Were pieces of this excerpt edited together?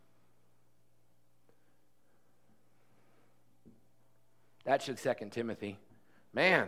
yes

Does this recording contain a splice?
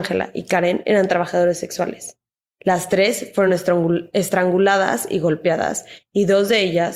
no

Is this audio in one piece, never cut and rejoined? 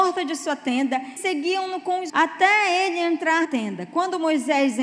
no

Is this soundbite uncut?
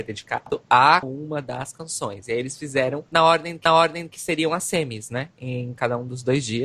no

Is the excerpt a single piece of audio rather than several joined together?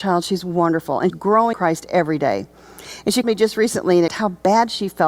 no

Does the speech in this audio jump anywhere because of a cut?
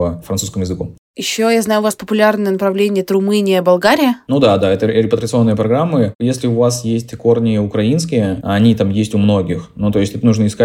no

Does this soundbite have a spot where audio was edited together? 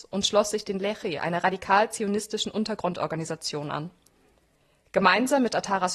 no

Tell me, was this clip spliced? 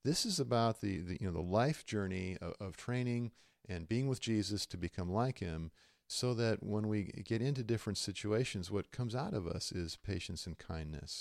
no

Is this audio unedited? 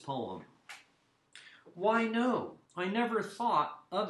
no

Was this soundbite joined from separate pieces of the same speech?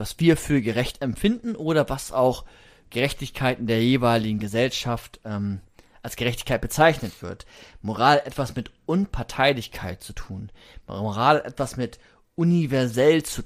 no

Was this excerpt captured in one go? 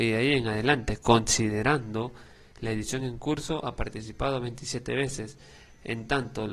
yes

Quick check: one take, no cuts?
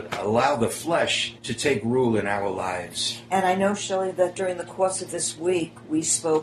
no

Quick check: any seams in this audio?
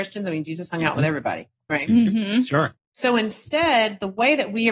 yes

